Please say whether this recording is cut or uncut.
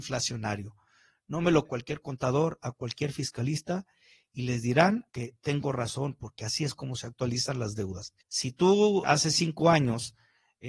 cut